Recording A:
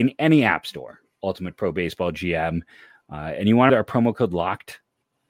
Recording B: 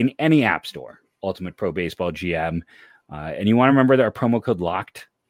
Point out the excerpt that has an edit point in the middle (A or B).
A